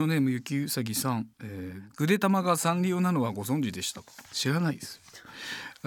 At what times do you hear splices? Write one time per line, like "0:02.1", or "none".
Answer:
0:01.3
0:04.3